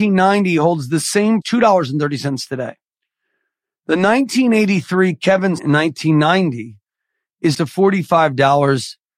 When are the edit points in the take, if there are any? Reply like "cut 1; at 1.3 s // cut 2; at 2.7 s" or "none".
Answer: cut 1; at 1.4 s // cut 2; at 5.6 s // cut 3; at 7.5 s